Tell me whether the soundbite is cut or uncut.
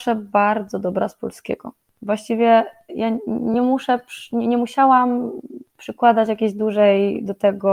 uncut